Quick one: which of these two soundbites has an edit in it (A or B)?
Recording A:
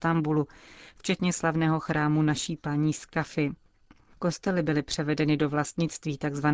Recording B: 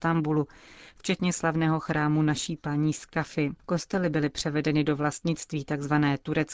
B